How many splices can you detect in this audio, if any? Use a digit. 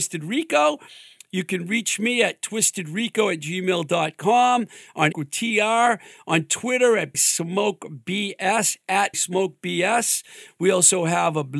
3